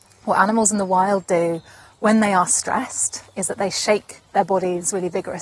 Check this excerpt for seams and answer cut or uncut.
uncut